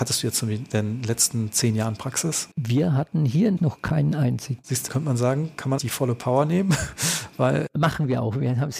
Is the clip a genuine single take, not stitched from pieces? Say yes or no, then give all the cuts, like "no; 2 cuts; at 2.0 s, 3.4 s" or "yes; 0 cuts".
no; 3 cuts; at 3.6 s, 4.9 s, 5.8 s